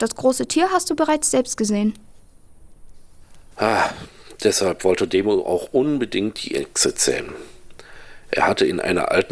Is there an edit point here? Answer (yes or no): no